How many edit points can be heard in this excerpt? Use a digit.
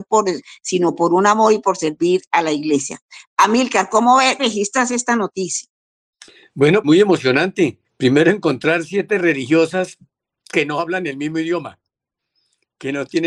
3